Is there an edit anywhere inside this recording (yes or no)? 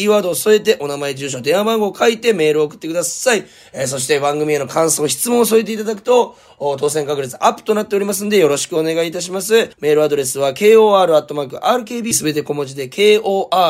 yes